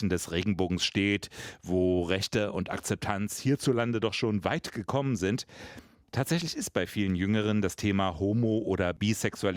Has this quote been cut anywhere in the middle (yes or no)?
no